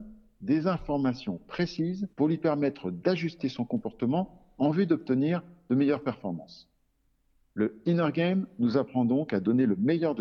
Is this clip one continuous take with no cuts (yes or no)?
no